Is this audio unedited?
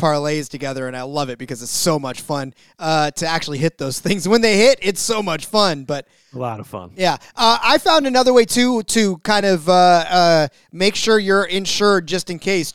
yes; 0 cuts

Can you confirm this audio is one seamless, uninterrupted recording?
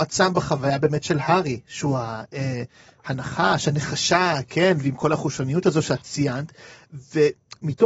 yes; 0 cuts

